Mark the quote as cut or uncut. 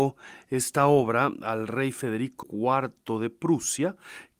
cut